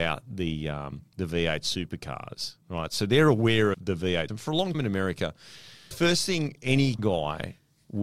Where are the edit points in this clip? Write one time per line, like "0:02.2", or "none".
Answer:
0:01.1
0:02.6
0:03.7
0:04.3
0:04.7
0:05.9
0:07.0